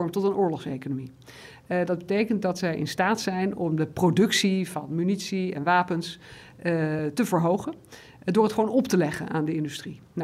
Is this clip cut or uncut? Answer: uncut